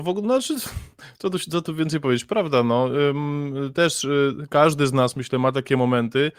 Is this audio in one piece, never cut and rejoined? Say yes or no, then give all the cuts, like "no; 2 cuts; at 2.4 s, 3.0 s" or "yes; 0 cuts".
yes; 0 cuts